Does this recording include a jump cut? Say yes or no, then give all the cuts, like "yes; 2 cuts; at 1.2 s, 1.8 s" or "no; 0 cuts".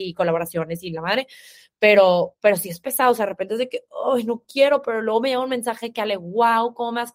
no; 0 cuts